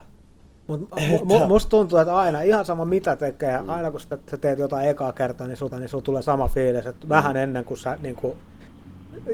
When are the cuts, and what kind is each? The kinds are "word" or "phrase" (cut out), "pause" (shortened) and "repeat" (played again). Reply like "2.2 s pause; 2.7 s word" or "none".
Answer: 5.7 s repeat